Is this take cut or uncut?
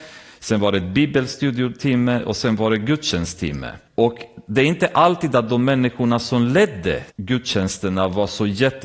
cut